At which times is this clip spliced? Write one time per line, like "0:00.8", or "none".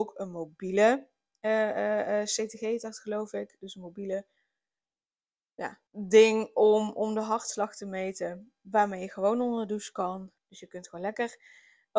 0:05.9
0:10.4